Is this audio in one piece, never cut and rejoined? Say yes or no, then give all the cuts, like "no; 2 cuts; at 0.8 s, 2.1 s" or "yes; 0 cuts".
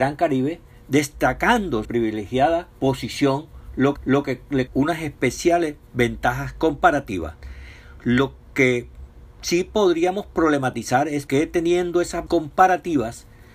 no; 6 cuts; at 1.8 s, 2.7 s, 4.0 s, 4.7 s, 11.3 s, 12.3 s